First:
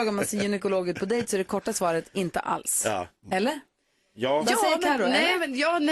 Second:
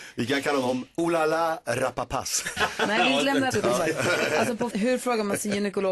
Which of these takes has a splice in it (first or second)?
second